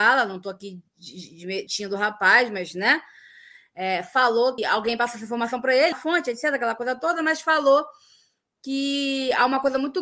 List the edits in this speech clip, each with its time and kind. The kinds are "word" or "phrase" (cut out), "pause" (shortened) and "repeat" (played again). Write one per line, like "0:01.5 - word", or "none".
0:01.7 - word
0:04.6 - word
0:05.9 - phrase